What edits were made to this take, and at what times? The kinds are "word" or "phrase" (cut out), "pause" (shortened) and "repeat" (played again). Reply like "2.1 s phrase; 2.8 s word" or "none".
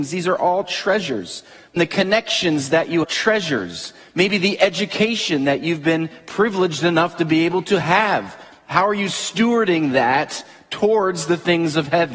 1.8 s phrase; 3.0 s phrase